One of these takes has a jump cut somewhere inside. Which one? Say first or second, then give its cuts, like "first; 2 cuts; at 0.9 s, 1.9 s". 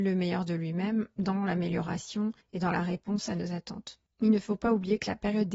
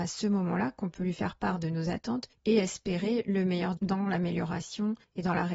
second; 1 cut; at 3.8 s